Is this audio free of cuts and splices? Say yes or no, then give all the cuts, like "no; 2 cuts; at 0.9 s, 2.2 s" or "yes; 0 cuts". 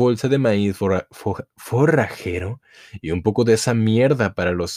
yes; 0 cuts